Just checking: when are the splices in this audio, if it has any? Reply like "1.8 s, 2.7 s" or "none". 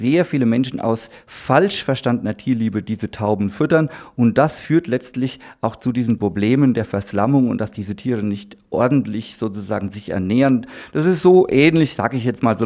none